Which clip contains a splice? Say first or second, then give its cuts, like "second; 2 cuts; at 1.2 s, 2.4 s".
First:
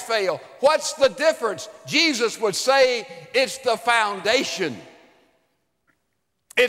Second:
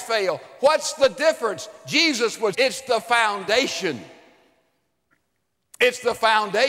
second; 1 cut; at 2.5 s